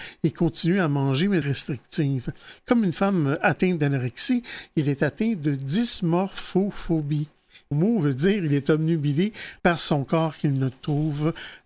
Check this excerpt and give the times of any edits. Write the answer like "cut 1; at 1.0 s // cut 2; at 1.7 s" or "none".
cut 1; at 1.4 s // cut 2; at 7.7 s // cut 3; at 9.6 s